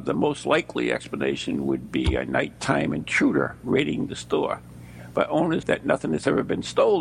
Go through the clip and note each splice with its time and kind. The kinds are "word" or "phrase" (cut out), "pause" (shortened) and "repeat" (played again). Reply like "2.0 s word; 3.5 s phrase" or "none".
5.6 s word